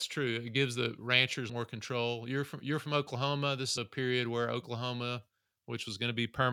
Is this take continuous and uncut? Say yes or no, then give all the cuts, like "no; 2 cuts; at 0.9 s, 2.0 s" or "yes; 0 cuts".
no; 2 cuts; at 1.5 s, 3.8 s